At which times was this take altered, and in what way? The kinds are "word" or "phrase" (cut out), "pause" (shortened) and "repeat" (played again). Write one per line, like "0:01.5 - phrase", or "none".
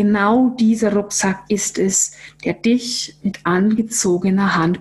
none